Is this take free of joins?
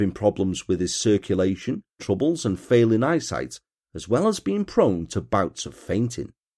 no; 1 cut; at 2.0 s

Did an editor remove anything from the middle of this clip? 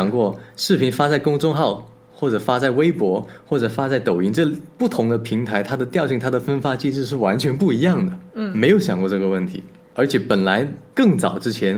no; 0 cuts

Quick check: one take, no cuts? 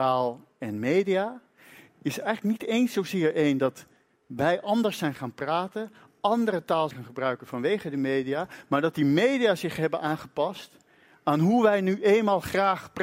no; 1 cut; at 6.9 s

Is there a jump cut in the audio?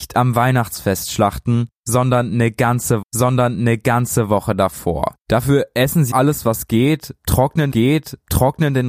yes; 4 cuts; at 3.0 s, 5.2 s, 6.1 s, 7.7 s

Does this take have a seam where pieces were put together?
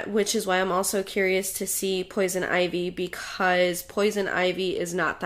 no; 0 cuts

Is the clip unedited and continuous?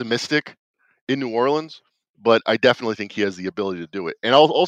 yes; 0 cuts

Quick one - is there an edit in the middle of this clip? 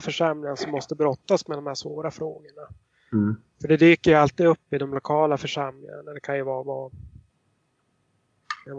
no; 0 cuts

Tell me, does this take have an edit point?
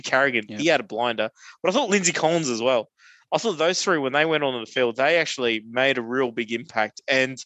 no; 0 cuts

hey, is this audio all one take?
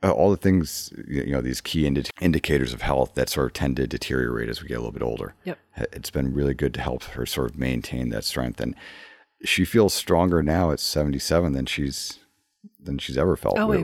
yes; 0 cuts

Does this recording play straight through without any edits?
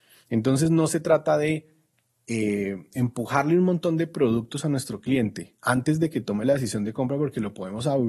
yes; 0 cuts

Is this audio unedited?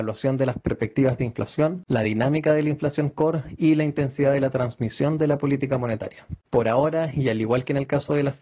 yes; 0 cuts

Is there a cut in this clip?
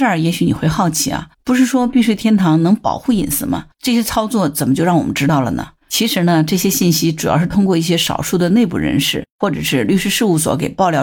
yes; 4 cuts; at 1.3 s, 3.7 s, 5.8 s, 9.3 s

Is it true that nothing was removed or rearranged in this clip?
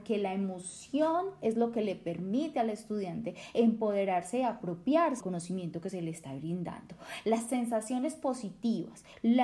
no; 1 cut; at 5.2 s

